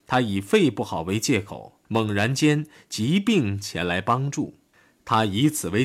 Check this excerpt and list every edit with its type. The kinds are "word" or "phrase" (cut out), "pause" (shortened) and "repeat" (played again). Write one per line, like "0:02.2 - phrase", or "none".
0:01.8 - pause